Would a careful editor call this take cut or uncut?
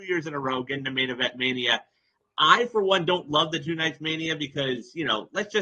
uncut